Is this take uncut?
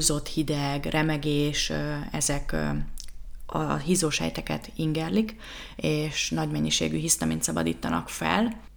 yes; 0 cuts

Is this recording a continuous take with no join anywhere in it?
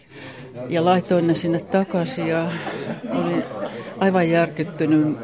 yes; 0 cuts

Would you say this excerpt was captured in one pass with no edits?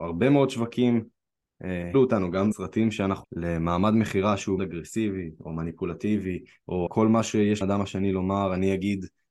no; 6 cuts; at 1.9 s, 2.5 s, 3.2 s, 4.6 s, 6.9 s, 7.6 s

